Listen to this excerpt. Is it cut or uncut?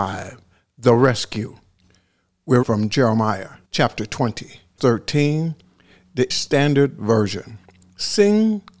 cut